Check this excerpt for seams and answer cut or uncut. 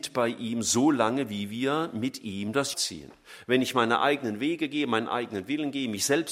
cut